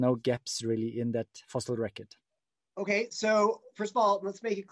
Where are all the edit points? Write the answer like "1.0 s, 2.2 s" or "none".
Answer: 2.4 s

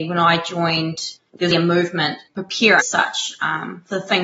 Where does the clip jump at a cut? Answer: 1.2 s, 1.5 s, 2.3 s, 2.8 s

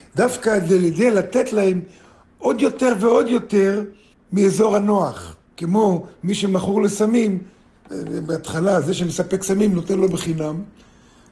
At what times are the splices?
4.1 s, 5.5 s

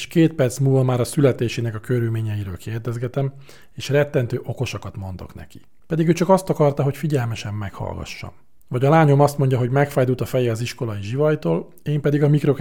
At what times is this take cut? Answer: none

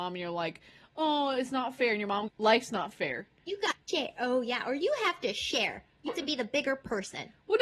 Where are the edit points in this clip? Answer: 2.3 s, 3.8 s, 6.1 s

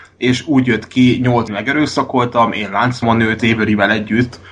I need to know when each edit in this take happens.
1.5 s, 3.0 s, 3.4 s

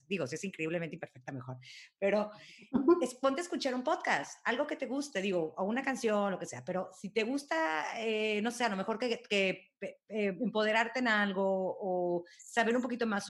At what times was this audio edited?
none

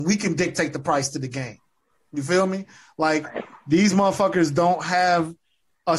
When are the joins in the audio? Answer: none

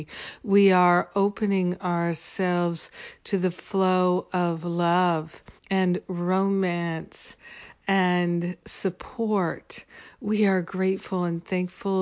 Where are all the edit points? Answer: 5.6 s

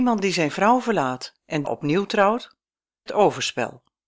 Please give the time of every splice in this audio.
1.6 s, 3.1 s

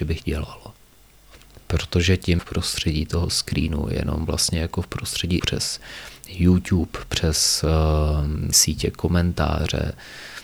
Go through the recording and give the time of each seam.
2.4 s, 5.4 s, 8.5 s

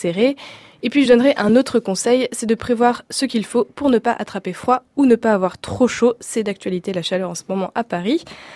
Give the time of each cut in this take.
none

